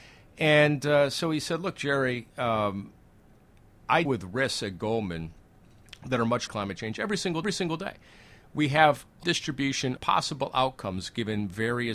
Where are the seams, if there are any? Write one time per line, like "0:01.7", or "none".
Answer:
0:02.3
0:04.1
0:06.5
0:07.4
0:09.2
0:10.0